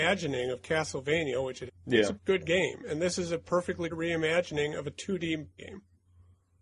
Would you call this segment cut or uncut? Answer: cut